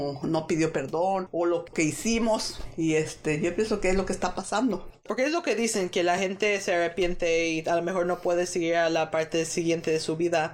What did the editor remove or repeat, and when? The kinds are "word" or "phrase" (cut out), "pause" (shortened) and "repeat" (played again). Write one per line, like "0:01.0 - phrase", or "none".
none